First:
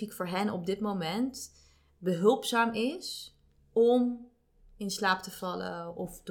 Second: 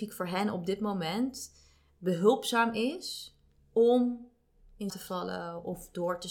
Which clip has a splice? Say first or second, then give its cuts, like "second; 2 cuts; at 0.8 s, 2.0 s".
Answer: second; 1 cut; at 4.9 s